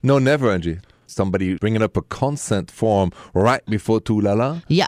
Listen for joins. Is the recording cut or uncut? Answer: uncut